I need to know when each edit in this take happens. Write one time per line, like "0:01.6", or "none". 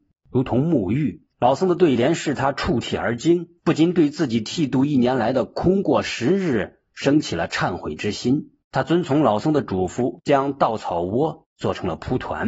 0:01.3
0:03.6
0:08.6